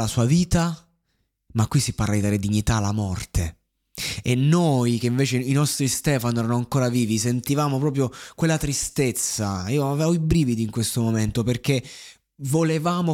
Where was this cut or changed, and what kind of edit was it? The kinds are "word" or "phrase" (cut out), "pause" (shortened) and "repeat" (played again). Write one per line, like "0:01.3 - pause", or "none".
none